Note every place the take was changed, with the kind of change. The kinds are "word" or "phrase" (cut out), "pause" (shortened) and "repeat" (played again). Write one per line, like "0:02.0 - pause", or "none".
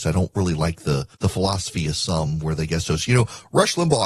0:01.1 - pause
0:02.7 - phrase